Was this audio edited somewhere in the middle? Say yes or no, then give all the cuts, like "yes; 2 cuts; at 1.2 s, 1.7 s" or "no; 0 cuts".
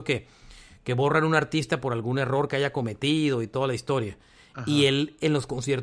no; 0 cuts